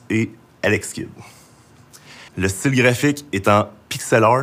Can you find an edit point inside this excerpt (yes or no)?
yes